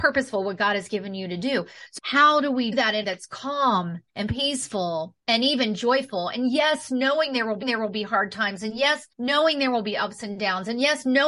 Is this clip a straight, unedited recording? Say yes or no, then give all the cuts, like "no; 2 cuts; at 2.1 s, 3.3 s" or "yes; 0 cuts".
no; 7 cuts; at 2.0 s, 2.7 s, 3.0 s, 4.1 s, 5.2 s, 7.6 s, 9.1 s